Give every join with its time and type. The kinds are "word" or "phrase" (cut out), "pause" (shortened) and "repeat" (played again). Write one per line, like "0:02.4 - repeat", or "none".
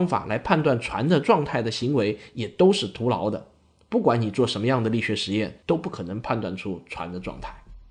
0:05.6 - pause